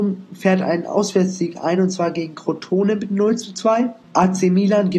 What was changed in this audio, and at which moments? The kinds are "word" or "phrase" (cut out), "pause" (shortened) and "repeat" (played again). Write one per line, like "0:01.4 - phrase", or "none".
none